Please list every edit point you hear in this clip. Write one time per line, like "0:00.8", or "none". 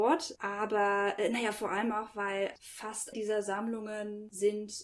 0:03.1